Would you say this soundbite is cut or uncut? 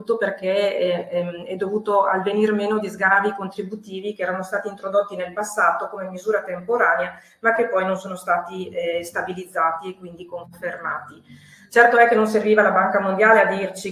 uncut